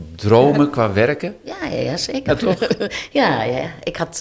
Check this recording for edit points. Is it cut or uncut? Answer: uncut